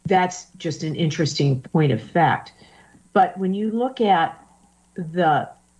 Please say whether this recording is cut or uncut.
uncut